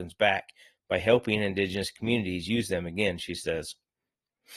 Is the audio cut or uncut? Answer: uncut